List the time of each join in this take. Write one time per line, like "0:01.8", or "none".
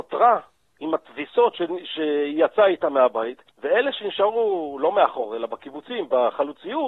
0:03.5